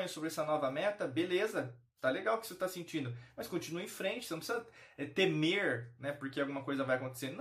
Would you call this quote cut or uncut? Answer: uncut